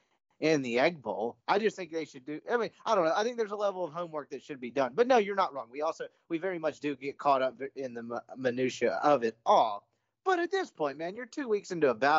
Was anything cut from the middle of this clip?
yes; 1 cut; at 1.4 s

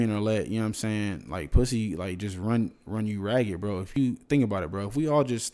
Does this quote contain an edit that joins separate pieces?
no; 0 cuts

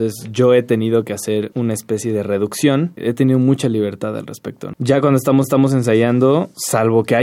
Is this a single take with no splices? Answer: no; 1 cut; at 5.4 s

